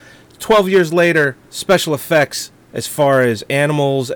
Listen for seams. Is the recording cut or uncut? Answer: cut